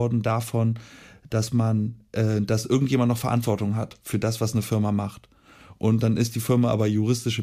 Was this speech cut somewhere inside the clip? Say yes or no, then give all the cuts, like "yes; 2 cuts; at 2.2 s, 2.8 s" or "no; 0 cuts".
no; 0 cuts